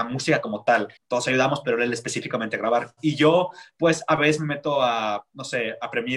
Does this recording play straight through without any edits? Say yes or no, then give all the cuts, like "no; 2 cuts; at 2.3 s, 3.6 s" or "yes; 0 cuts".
no; 1 cut; at 1.0 s